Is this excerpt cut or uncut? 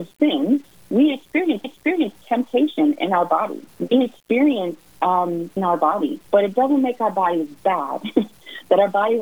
cut